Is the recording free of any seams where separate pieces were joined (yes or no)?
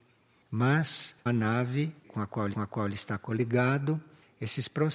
no